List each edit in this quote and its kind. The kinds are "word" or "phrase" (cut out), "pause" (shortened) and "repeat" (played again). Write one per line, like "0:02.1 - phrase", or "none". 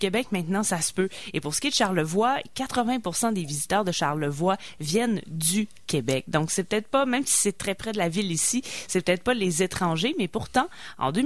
none